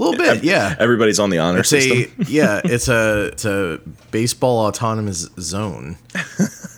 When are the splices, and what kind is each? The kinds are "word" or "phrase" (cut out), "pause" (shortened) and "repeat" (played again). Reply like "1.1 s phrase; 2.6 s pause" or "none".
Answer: 3.4 s word